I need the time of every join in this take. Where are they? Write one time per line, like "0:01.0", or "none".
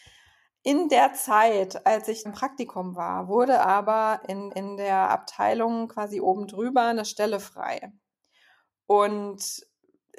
0:02.3
0:04.5